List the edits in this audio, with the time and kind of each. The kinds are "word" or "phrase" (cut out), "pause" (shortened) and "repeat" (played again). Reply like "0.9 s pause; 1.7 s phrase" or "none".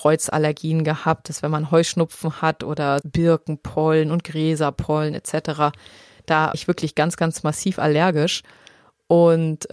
3.0 s word; 6.5 s word